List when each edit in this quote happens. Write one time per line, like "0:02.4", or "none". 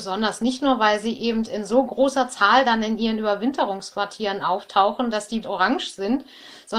0:05.4